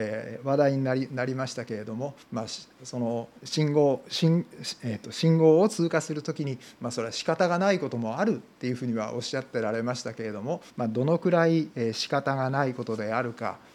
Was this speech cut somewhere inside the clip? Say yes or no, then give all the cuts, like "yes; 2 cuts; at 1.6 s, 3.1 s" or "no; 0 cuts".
yes; 3 cuts; at 2.2 s, 3.4 s, 10.7 s